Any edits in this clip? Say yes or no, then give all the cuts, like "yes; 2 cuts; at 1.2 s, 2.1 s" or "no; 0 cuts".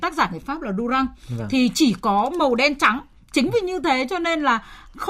no; 0 cuts